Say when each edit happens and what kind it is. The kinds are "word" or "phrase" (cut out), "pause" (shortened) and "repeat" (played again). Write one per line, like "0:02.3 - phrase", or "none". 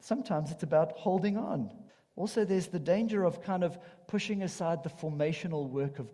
0:01.9 - pause